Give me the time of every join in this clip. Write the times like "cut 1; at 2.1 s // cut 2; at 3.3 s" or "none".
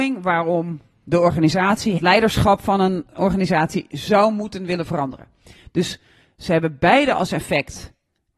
cut 1; at 2.0 s